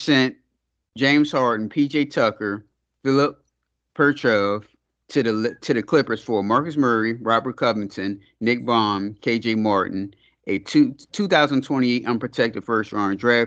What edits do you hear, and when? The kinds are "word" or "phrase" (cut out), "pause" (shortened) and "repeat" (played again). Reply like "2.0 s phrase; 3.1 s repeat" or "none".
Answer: none